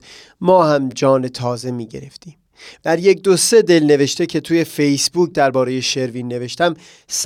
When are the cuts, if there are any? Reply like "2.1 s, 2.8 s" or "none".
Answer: none